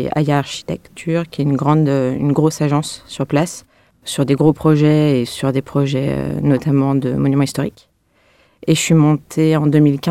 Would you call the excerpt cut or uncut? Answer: uncut